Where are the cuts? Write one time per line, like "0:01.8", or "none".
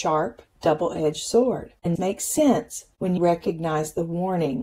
0:02.0
0:03.2